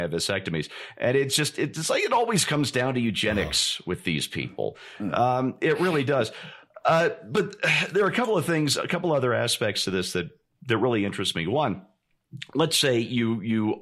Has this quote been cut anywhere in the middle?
no; 0 cuts

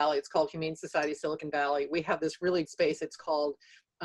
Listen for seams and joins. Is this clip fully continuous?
no; 1 cut; at 2.6 s

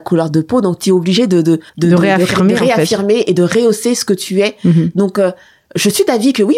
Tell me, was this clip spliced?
yes; 1 cut; at 1.7 s

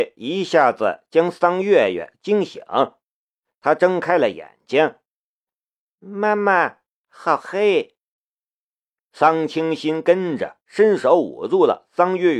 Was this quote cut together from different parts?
no; 0 cuts

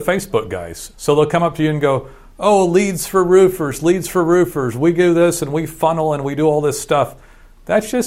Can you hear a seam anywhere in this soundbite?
no; 0 cuts

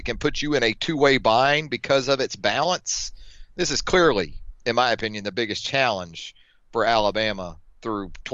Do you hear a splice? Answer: no; 0 cuts

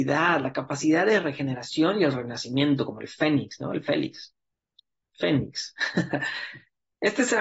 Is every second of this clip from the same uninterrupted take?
yes; 0 cuts

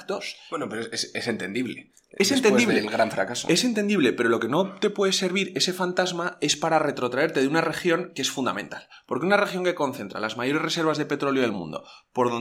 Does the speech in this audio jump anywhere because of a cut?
no; 0 cuts

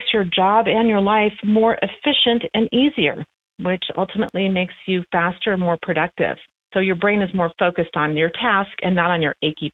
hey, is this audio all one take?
yes; 0 cuts

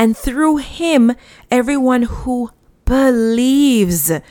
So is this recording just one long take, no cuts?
yes; 0 cuts

